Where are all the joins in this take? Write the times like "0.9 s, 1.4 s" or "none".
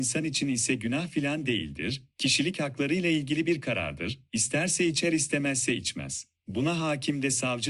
6.4 s